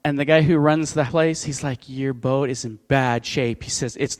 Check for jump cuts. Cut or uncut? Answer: cut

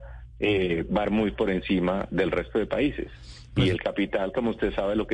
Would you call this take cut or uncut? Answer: cut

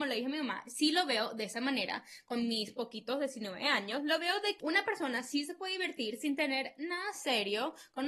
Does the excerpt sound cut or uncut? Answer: cut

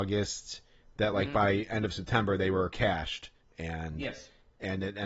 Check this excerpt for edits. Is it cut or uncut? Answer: uncut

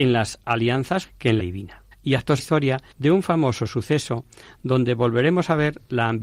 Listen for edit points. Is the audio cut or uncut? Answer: cut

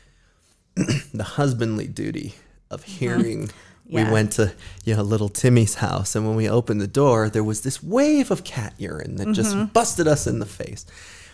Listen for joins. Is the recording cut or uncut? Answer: uncut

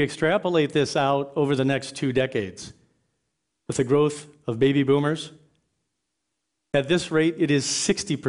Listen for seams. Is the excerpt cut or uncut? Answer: uncut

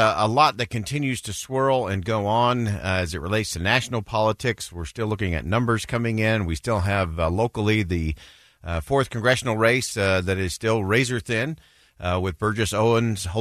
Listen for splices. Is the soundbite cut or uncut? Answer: uncut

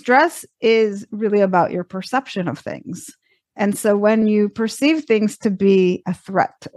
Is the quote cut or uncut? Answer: uncut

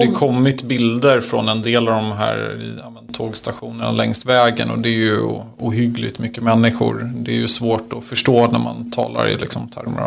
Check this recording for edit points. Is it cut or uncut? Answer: uncut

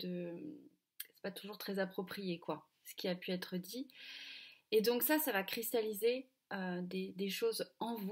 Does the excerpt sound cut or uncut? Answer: uncut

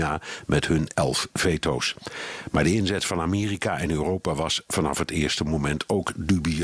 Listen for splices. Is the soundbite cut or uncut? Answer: uncut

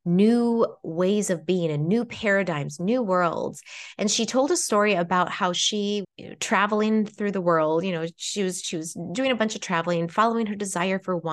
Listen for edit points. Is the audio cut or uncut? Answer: cut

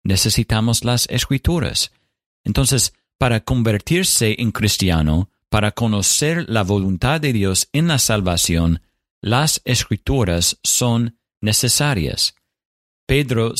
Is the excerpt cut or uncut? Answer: uncut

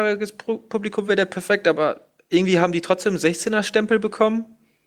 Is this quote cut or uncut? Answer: uncut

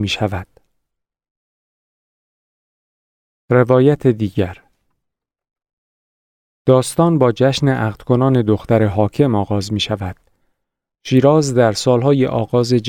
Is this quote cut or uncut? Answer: uncut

